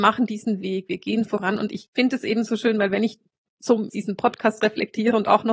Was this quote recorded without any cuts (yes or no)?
no